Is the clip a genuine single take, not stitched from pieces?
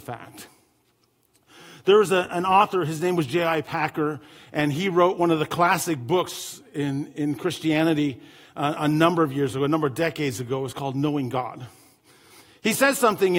yes; 0 cuts

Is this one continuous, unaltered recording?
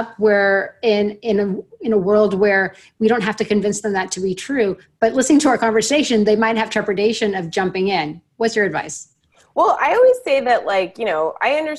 yes; 0 cuts

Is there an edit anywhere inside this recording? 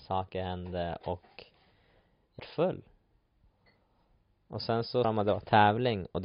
yes; 2 cuts; at 2.4 s, 5.0 s

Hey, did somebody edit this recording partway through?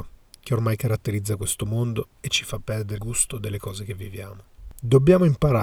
yes; 1 cut; at 3.0 s

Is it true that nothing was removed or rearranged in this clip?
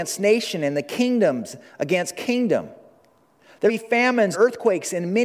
no; 2 cuts; at 3.7 s, 4.3 s

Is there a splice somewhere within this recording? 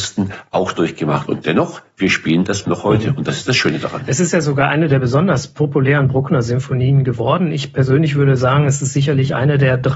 yes; 1 cut; at 2.6 s

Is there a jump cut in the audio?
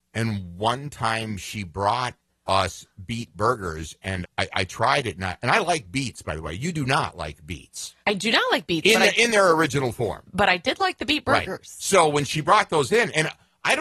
yes; 3 cuts; at 2.3 s, 4.2 s, 8.0 s

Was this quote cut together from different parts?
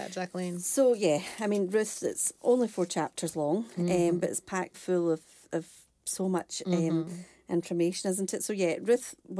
yes; 2 cuts; at 4.7 s, 5.9 s

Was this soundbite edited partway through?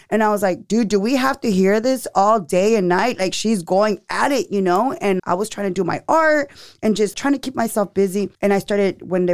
yes; 3 cuts; at 5.2 s, 7.1 s, 8.3 s

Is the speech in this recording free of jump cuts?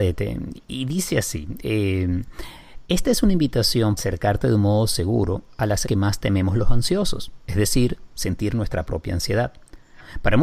no; 2 cuts; at 4.0 s, 5.8 s

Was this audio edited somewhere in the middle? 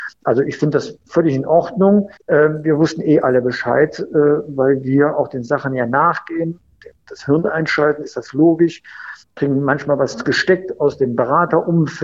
yes; 1 cut; at 2.2 s

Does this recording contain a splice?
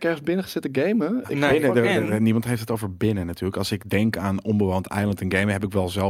no; 0 cuts

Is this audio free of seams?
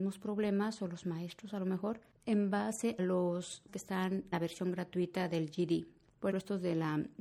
no; 4 cuts; at 3.0 s, 3.7 s, 4.3 s, 6.3 s

